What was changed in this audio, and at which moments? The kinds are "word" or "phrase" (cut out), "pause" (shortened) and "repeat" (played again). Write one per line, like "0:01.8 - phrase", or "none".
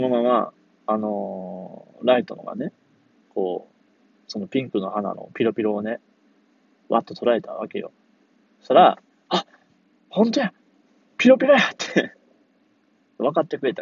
none

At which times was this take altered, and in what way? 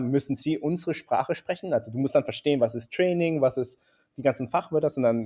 none

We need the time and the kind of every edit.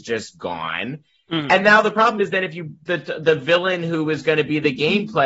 none

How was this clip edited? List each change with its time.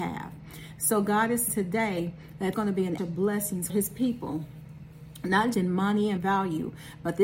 0:01.5 - word
0:02.5 - word
0:03.0 - word
0:03.7 - word
0:05.5 - word
0:06.2 - word

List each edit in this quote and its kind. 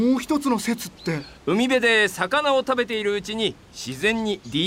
0:01.4 - pause

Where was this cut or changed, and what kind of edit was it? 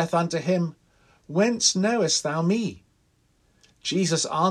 none

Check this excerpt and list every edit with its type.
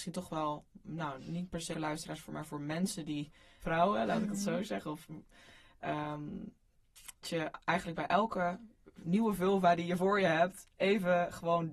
0:01.7 - word
0:03.6 - phrase
0:07.2 - word

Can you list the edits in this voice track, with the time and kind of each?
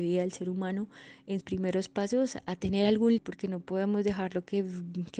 0:01.4 - word
0:03.2 - word

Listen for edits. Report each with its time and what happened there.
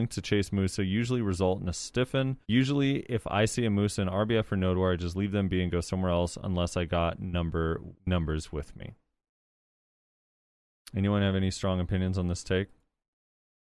0:02.4 - pause
0:08.0 - pause

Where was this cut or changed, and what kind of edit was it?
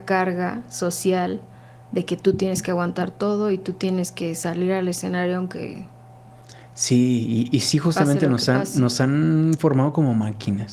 none

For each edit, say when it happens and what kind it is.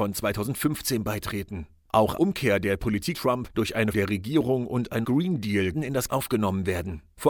0:02.2 - word
0:03.1 - word
0:03.9 - word
0:05.0 - word
0:05.7 - word
0:06.1 - word

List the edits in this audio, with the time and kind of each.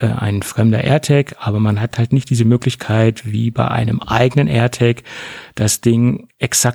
none

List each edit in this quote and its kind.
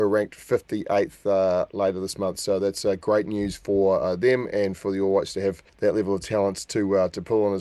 0:05.7 - pause

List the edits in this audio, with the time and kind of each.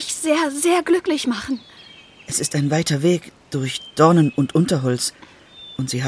none

